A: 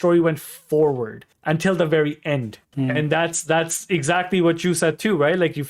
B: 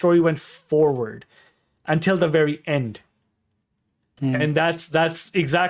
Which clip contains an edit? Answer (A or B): A